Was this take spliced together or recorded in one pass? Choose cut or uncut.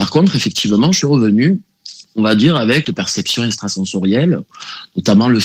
cut